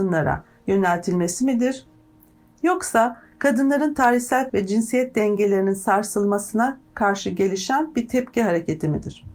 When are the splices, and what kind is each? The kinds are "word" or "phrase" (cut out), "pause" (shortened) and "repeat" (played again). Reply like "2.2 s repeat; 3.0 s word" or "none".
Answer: 4.5 s word